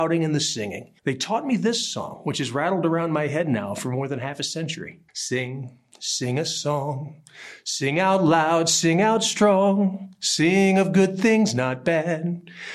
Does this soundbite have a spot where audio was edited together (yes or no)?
yes